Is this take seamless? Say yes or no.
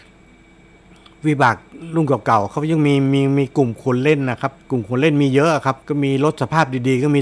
no